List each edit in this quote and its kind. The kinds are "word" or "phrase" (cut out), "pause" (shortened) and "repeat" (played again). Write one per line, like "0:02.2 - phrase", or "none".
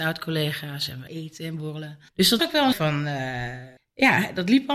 0:01.1 - word
0:02.1 - pause
0:02.4 - word
0:02.7 - word
0:03.8 - pause